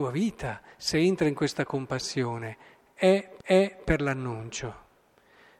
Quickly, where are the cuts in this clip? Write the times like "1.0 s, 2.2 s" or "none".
3.4 s